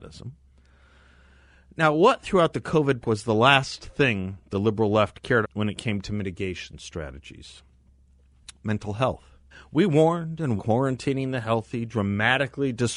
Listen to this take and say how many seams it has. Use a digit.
4